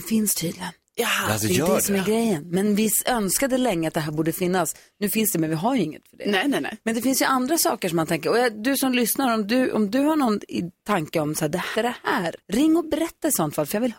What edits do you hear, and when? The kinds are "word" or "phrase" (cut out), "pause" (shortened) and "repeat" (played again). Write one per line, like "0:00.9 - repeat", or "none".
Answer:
0:11.8 - phrase
0:12.4 - pause